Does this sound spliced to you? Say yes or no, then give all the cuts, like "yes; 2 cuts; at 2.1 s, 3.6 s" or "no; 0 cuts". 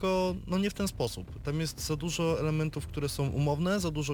no; 0 cuts